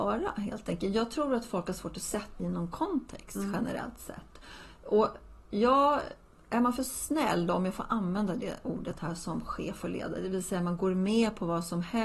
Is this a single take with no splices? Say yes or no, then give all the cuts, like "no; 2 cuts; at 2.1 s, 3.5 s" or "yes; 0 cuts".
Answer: no; 1 cut; at 2.4 s